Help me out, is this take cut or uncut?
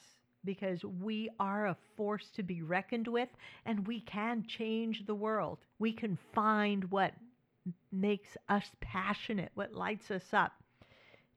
cut